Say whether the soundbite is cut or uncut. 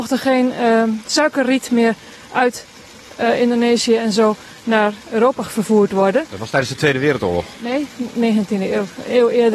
uncut